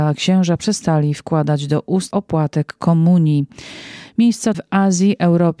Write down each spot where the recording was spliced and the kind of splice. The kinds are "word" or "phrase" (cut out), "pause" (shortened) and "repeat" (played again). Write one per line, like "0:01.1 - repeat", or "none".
0:02.1 - word
0:04.5 - word